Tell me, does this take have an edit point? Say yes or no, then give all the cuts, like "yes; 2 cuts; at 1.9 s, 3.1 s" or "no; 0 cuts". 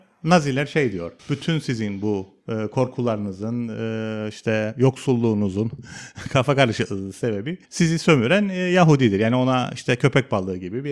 yes; 3 cuts; at 1.2 s, 2.4 s, 7.6 s